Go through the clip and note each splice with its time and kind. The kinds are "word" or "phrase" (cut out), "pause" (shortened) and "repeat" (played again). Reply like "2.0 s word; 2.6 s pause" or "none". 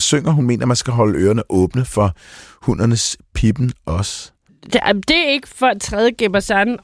none